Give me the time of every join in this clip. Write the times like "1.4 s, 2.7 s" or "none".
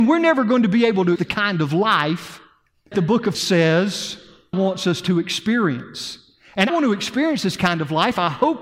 1.2 s, 2.9 s, 3.3 s, 4.5 s, 6.7 s